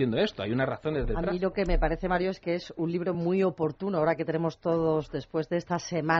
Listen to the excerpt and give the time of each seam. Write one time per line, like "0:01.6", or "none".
none